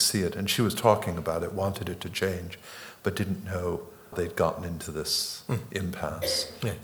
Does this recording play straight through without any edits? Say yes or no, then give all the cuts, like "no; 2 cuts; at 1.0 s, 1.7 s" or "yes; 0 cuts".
no; 1 cut; at 4.1 s